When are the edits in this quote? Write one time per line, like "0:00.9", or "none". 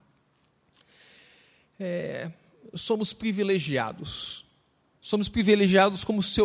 none